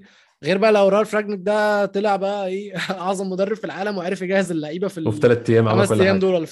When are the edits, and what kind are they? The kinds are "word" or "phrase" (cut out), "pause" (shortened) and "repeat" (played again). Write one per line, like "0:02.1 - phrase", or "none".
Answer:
none